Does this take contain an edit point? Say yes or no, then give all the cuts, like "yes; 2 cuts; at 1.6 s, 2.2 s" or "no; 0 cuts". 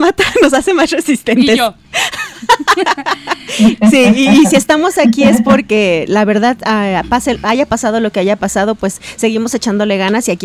no; 0 cuts